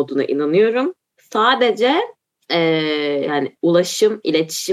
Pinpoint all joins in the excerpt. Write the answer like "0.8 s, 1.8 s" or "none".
none